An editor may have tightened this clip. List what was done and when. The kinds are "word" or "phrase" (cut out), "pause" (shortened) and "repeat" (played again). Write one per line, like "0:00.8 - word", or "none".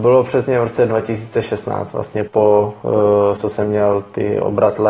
0:02.3 - word
0:03.4 - word